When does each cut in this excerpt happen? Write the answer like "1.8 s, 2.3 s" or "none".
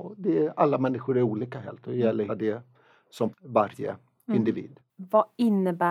1.8 s, 2.3 s, 3.3 s

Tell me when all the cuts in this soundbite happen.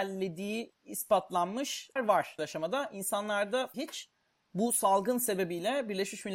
2.0 s, 2.4 s, 3.7 s

